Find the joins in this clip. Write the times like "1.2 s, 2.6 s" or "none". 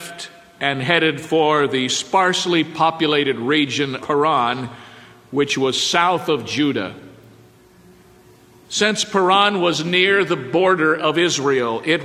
4.0 s